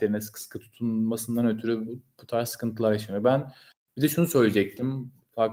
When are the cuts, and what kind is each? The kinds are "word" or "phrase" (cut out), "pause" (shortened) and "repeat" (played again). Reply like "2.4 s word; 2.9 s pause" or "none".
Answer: none